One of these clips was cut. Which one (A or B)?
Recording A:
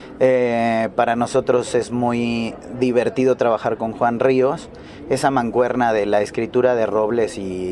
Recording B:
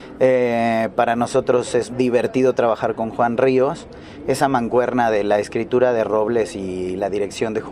B